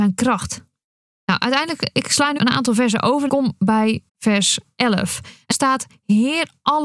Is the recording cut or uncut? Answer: cut